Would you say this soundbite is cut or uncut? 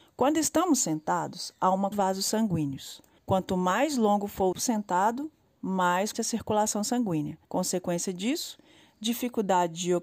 cut